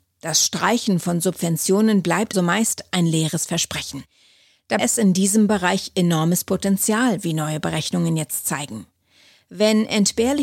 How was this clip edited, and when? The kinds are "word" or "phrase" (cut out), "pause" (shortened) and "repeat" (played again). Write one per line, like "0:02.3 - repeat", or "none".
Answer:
0:02.3 - word
0:04.8 - word